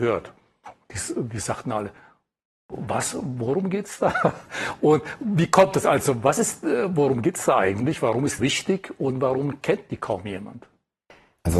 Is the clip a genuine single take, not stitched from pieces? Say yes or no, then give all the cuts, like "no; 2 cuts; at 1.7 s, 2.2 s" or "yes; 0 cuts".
no; 1 cut; at 8.4 s